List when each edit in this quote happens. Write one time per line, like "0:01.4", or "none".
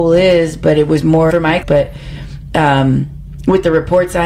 0:01.3
0:01.6

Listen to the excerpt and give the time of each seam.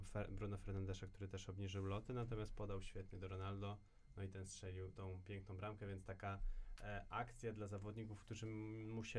none

